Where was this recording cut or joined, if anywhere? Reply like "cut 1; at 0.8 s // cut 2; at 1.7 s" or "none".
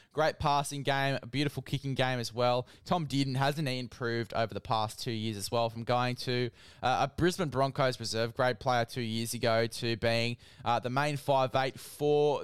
none